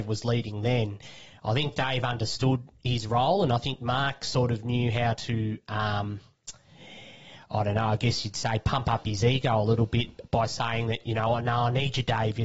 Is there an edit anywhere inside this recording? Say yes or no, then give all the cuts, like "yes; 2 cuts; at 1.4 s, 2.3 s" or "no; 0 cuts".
no; 0 cuts